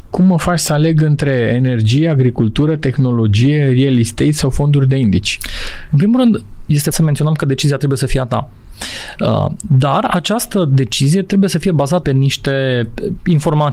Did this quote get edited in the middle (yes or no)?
yes